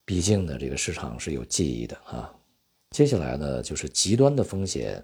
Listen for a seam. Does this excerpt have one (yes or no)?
no